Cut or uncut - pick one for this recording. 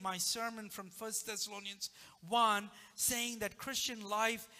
uncut